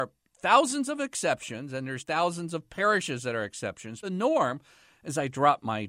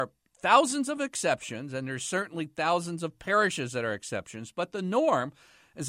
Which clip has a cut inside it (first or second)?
first